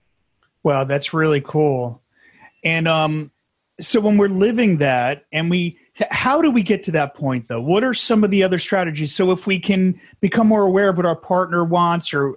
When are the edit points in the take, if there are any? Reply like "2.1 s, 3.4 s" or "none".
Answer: none